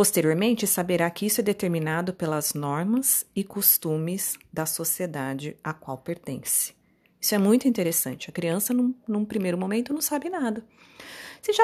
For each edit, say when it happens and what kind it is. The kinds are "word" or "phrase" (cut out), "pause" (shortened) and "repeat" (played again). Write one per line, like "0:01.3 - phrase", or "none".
none